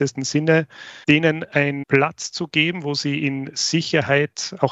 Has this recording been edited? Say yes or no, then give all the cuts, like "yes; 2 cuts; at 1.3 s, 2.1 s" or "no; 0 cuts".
no; 0 cuts